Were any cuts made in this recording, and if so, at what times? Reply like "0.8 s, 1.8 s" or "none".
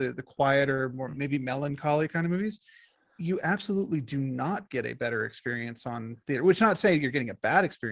none